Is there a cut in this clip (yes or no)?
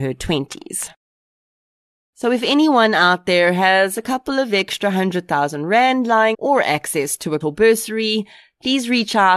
yes